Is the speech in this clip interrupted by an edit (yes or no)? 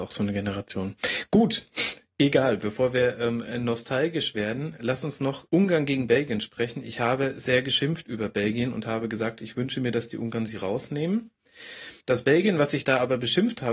yes